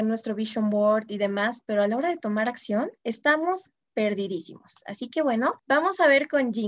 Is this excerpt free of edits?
no; 2 cuts; at 3.0 s, 5.6 s

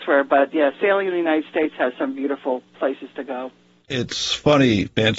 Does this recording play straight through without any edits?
yes; 0 cuts

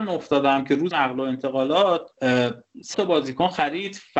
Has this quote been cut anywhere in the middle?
yes; 2 cuts; at 0.9 s, 2.9 s

